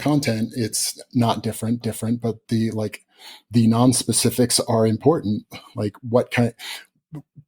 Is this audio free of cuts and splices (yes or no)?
no